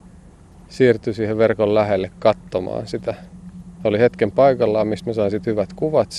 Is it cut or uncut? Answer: uncut